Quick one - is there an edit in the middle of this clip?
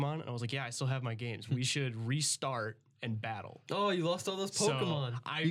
no; 0 cuts

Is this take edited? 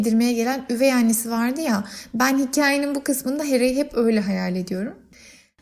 no; 0 cuts

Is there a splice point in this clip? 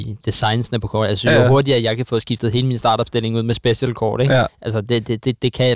no; 0 cuts

